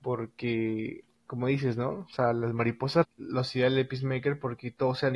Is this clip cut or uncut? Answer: cut